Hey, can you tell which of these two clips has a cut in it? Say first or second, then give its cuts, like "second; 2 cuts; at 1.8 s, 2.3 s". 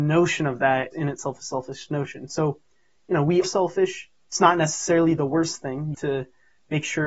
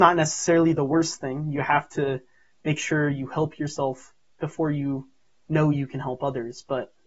first; 3 cuts; at 0.9 s, 3.4 s, 5.9 s